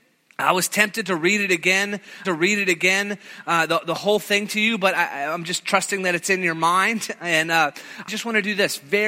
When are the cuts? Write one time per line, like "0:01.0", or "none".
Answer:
0:02.2
0:08.1